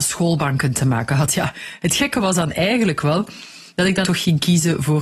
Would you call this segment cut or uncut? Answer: cut